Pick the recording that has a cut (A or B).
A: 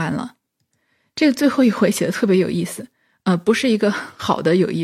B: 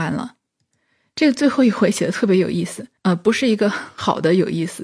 B